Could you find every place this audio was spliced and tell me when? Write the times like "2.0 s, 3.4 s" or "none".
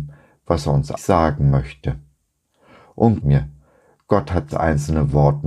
1.0 s, 3.2 s, 4.5 s